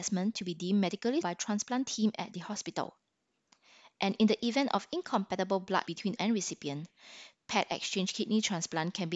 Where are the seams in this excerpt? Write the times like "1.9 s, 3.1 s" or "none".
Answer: 1.2 s, 5.9 s, 6.2 s